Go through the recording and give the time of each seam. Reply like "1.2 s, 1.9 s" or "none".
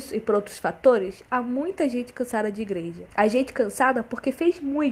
3.1 s

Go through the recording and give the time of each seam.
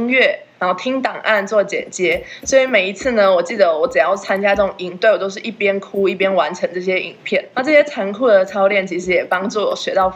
7.5 s

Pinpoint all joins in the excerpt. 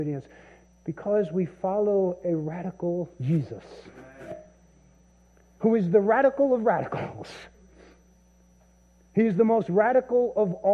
none

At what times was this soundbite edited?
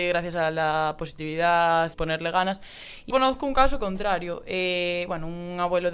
1.9 s, 3.1 s

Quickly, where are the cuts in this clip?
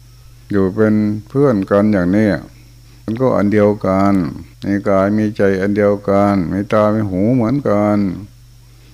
2.8 s, 4.5 s

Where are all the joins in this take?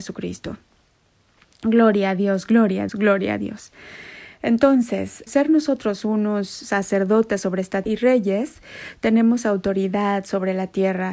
2.9 s, 5.3 s, 7.8 s

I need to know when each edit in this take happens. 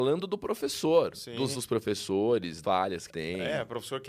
1.5 s, 2.6 s, 3.1 s

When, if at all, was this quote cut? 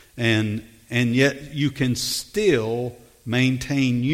none

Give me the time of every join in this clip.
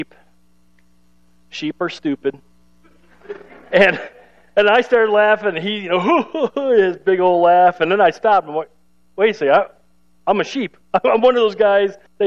none

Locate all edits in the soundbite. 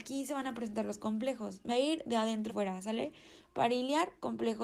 1.7 s, 2.5 s

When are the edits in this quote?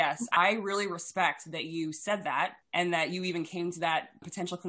2.6 s

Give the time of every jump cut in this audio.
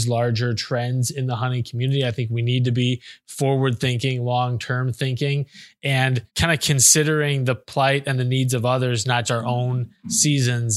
6.3 s, 9.2 s

